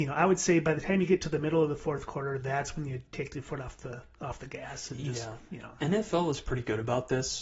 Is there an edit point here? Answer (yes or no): no